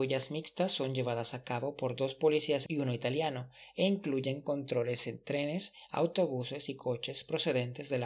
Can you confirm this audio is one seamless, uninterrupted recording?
no; 1 cut; at 2.7 s

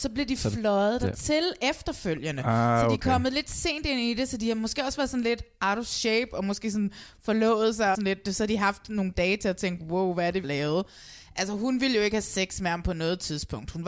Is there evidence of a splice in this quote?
yes; 2 cuts; at 7.9 s, 10.4 s

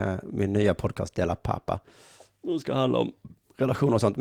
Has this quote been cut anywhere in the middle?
no; 0 cuts

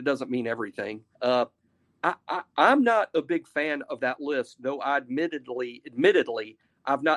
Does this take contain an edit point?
yes; 1 cut; at 1.1 s

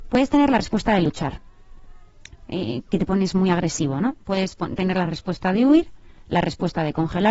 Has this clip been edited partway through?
no; 0 cuts

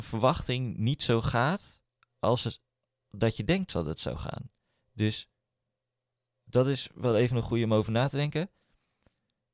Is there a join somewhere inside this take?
no; 0 cuts

